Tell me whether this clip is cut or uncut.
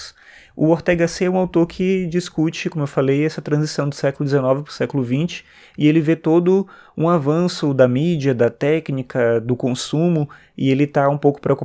uncut